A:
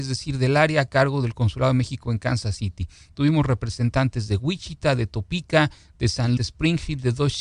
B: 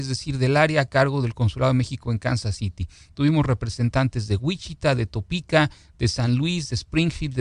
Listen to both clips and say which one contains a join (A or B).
A